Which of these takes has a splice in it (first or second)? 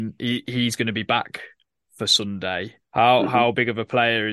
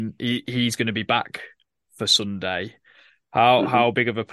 first